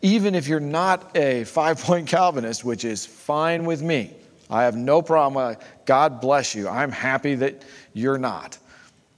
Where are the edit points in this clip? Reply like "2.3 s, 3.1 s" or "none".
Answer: none

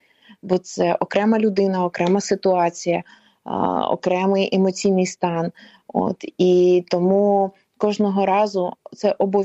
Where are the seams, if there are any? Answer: none

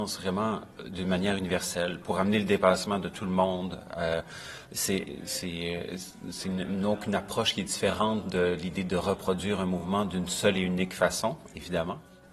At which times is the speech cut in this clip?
none

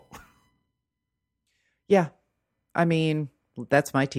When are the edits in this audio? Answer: none

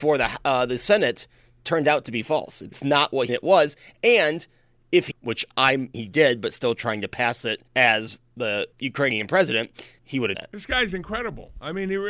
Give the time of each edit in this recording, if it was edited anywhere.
2.7 s, 3.3 s, 5.1 s, 5.9 s, 7.7 s, 8.7 s, 10.0 s, 10.3 s

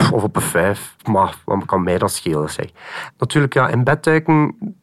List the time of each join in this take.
1.0 s

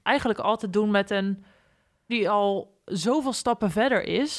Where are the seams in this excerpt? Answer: 2.1 s

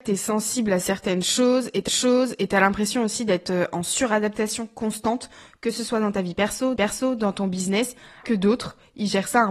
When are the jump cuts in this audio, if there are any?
1.9 s, 6.8 s, 8.2 s

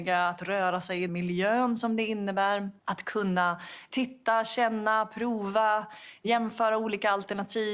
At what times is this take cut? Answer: 1.1 s, 2.8 s

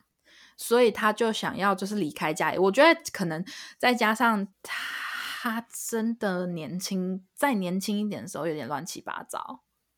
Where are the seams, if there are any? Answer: 4.5 s

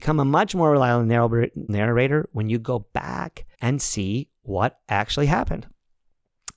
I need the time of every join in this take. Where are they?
1.7 s, 3.5 s

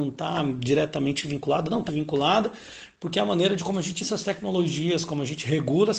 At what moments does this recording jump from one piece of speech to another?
1.9 s, 4.0 s

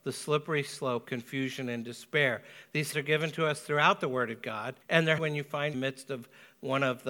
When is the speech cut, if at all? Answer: 1.0 s, 2.9 s, 4.8 s, 5.2 s, 5.7 s

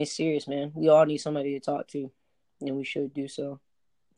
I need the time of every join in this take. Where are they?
none

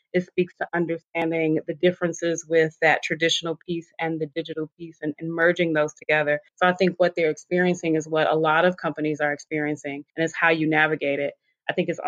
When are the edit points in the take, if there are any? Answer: 6.5 s, 10.1 s

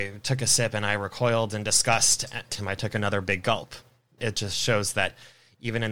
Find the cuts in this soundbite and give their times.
2.5 s, 4.2 s

